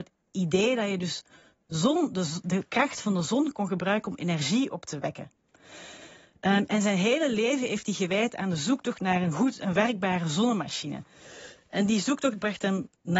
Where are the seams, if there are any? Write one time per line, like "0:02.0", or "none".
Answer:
none